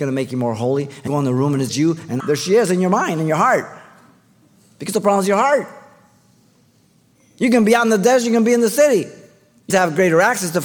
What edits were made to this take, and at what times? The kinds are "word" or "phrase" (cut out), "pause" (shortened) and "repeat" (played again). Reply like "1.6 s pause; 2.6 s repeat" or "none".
1.1 s word; 1.7 s word; 2.2 s word; 9.7 s word